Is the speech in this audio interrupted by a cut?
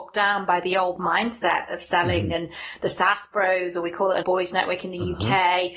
yes; 1 cut; at 4.2 s

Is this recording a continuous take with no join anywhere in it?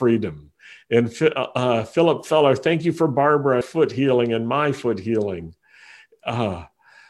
no; 1 cut; at 3.6 s

